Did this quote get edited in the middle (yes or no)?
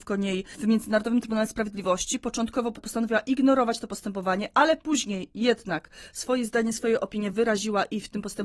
no